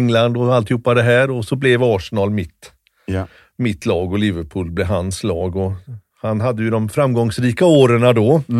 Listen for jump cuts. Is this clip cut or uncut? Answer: uncut